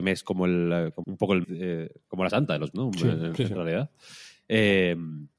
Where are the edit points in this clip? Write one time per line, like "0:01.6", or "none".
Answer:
0:01.0
0:01.4
0:02.3
0:02.7